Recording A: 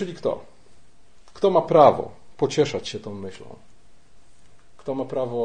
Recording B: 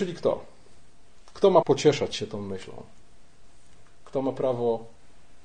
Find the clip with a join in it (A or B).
B